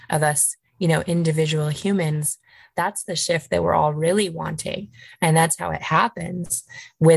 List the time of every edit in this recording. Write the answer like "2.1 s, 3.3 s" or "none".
none